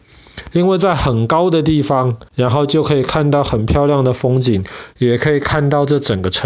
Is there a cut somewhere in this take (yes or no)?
yes